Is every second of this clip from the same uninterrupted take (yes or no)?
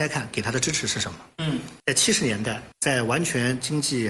no